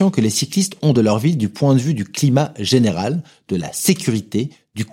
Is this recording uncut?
yes; 0 cuts

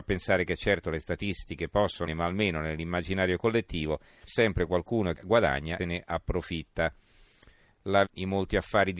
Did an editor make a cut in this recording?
yes; 5 cuts; at 2.1 s, 4.3 s, 5.2 s, 5.8 s, 8.1 s

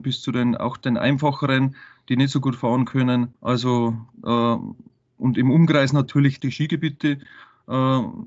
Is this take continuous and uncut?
no; 1 cut; at 3.3 s

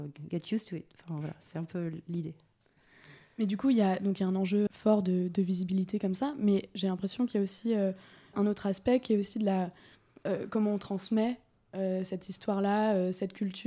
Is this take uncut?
no; 2 cuts; at 4.7 s, 8.3 s

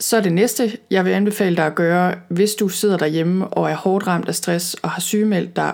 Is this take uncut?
yes; 0 cuts

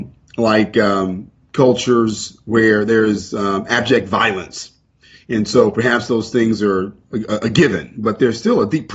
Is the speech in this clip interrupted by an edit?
no; 0 cuts

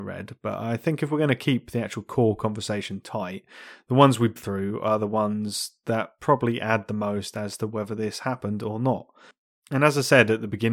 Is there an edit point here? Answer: yes; 1 cut; at 4.4 s

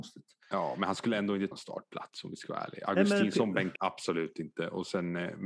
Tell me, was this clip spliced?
yes; 2 cuts; at 1.5 s, 3.8 s

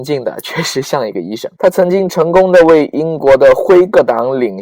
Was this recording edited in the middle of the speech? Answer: yes; 1 cut; at 1.5 s

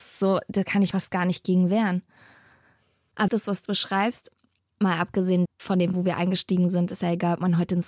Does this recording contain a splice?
yes; 5 cuts; at 0.9 s, 3.3 s, 3.7 s, 5.5 s, 5.9 s

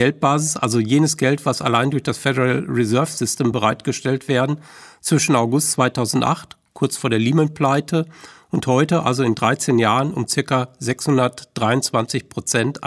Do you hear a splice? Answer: no; 0 cuts

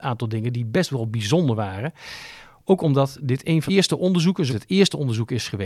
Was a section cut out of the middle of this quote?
yes; 2 cuts; at 3.7 s, 4.5 s

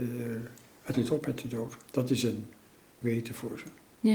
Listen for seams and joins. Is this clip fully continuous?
no; 2 cuts; at 0.9 s, 3.0 s

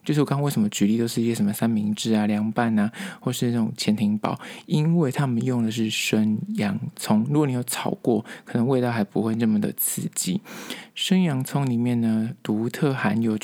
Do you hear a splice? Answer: no; 0 cuts

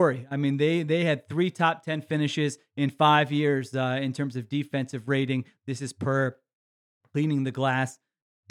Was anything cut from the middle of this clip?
no; 0 cuts

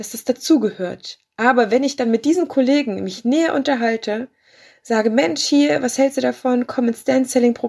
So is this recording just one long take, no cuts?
yes; 0 cuts

